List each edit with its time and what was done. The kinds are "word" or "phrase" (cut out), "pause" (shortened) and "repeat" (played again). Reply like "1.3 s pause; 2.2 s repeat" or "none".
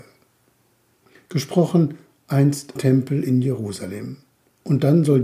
2.8 s word